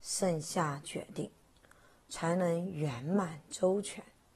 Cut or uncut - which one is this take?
uncut